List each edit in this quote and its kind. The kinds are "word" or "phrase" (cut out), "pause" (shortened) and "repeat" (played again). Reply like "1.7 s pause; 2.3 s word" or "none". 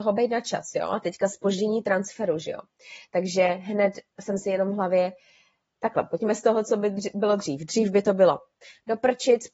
none